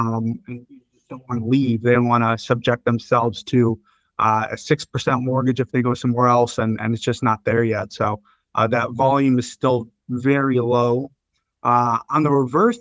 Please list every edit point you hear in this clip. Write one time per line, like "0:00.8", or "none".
none